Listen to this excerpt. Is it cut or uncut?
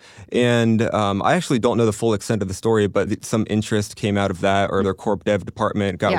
cut